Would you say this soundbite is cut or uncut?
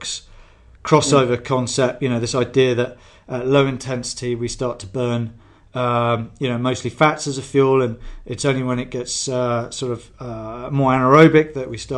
uncut